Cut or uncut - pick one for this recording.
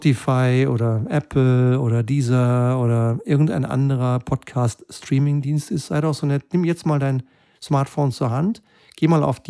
uncut